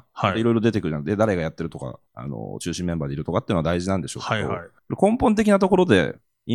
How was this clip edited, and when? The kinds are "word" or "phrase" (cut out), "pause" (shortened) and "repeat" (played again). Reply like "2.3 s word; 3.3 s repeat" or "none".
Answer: 2.1 s pause; 4.8 s pause